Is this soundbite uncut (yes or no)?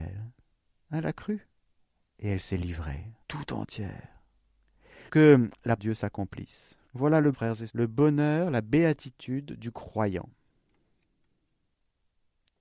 no